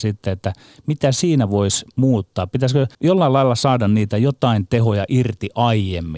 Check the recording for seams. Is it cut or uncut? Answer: cut